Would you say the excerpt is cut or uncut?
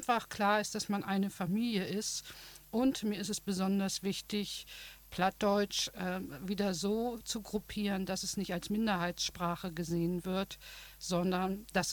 uncut